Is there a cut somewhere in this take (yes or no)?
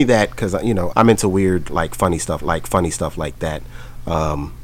yes